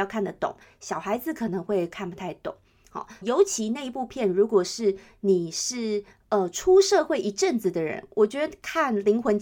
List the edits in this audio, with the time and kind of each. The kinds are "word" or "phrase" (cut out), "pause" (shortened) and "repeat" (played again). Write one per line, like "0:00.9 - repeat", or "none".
0:03.2 - phrase